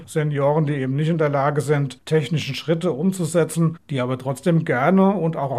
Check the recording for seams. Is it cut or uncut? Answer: cut